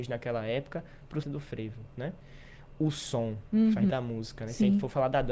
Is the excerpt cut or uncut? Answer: cut